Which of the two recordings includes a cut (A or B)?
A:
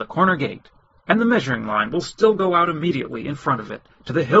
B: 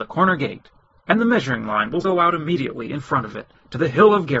B